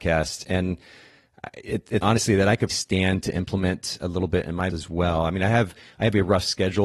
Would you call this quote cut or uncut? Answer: cut